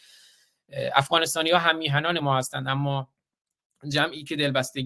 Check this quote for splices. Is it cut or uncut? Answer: uncut